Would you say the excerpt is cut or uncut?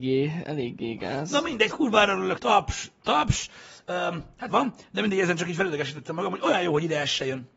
cut